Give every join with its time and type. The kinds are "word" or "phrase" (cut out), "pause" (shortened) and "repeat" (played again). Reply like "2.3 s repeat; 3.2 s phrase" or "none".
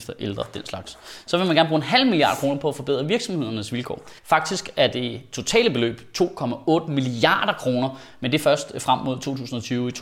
4.2 s pause